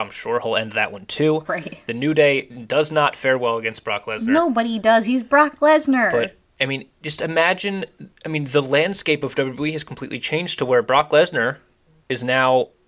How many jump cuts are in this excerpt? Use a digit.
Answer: 0